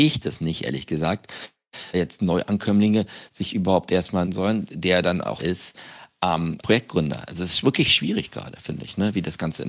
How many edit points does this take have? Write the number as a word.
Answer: four